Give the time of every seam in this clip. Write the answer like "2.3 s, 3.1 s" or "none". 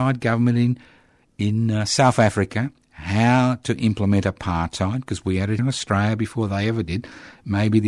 5.6 s